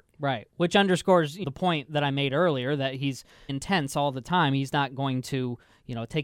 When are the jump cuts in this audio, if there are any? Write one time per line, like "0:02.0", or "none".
0:01.4
0:03.5

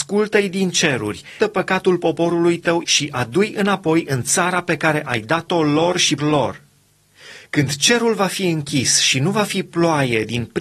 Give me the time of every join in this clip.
0:01.4
0:02.8
0:06.2

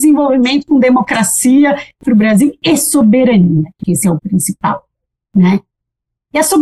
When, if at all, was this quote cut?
0:02.0
0:03.8
0:04.2

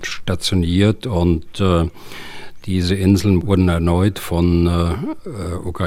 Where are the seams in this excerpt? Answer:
none

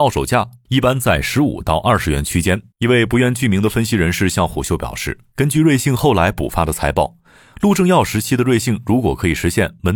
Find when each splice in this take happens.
0:02.7

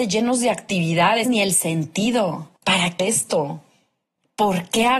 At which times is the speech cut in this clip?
0:01.2
0:02.6
0:03.0

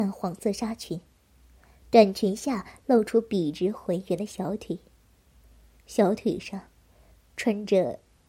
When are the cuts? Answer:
none

